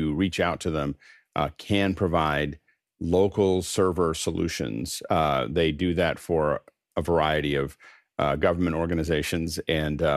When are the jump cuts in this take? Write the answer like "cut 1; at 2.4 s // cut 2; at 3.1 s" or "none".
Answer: none